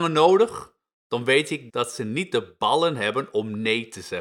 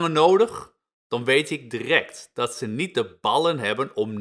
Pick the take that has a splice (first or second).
first